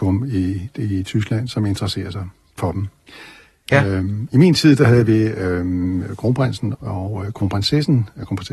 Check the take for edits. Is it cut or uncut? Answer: cut